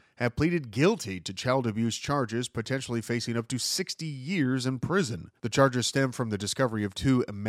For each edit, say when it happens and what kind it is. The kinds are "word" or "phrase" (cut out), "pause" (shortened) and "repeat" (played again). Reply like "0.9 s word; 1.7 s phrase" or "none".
5.4 s pause